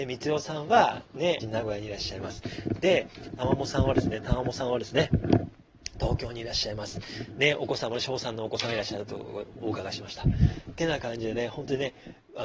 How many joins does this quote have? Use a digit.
2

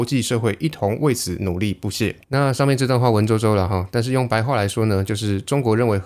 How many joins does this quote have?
1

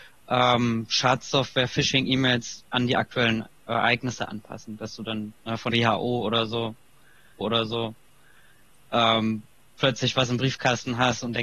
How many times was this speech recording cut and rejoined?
4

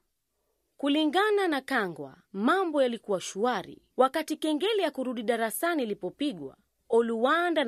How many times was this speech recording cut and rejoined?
3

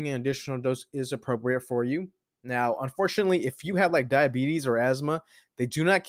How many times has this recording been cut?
0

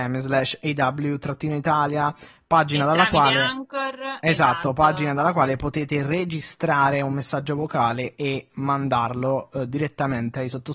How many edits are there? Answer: 0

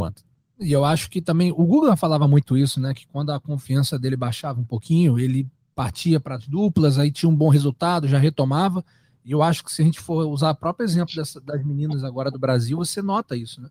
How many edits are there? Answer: 0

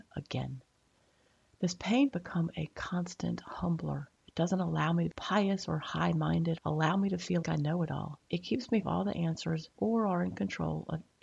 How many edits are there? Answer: 8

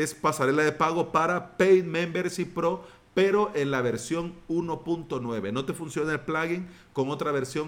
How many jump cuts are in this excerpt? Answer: 0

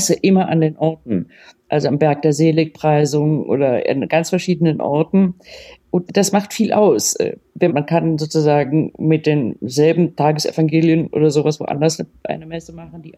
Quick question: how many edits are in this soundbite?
2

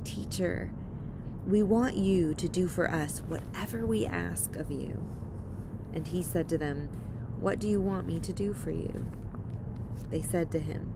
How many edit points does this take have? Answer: 0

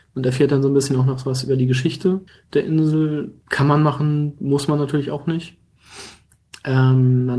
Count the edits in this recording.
2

